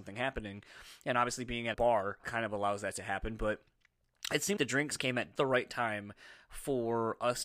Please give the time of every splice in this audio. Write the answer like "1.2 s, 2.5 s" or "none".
1.7 s, 2.2 s, 4.6 s, 5.4 s